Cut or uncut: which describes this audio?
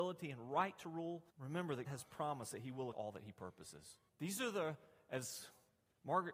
cut